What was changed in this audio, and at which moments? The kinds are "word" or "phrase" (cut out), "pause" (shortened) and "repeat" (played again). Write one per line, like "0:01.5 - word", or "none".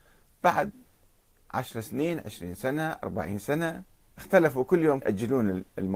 0:05.0 - word